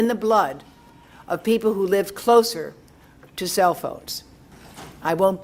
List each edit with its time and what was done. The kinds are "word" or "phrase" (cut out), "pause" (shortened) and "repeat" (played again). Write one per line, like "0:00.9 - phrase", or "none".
none

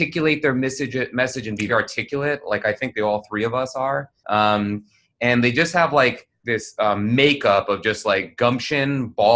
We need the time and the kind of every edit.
0:01.7 - word
0:04.2 - pause
0:06.4 - phrase

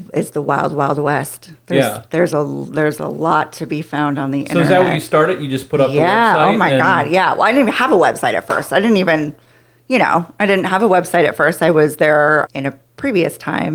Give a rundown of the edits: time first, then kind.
0:12.5 - word

